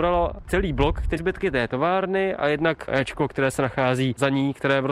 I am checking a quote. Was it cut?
yes; 2 cuts; at 1.2 s, 2.9 s

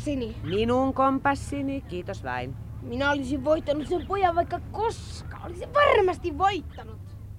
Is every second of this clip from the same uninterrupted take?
yes; 0 cuts

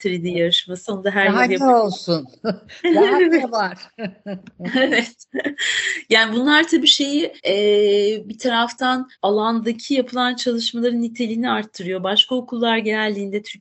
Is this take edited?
yes; 2 cuts; at 7.4 s, 9.2 s

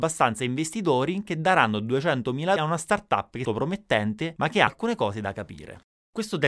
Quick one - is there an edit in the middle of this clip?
yes; 3 cuts; at 2.6 s, 3.4 s, 4.7 s

